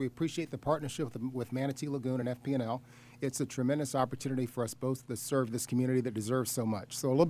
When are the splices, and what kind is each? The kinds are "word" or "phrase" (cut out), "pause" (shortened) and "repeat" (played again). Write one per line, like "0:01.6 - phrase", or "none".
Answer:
none